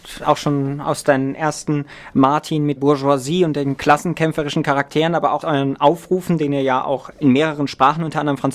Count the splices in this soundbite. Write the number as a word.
four